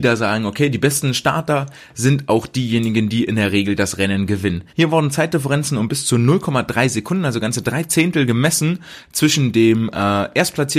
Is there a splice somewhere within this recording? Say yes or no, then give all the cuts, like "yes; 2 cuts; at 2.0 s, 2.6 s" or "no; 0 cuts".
yes; 1 cut; at 4.7 s